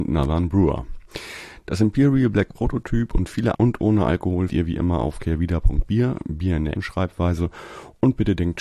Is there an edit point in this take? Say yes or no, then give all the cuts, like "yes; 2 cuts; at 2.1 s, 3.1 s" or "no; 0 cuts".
yes; 3 cuts; at 3.5 s, 4.5 s, 6.8 s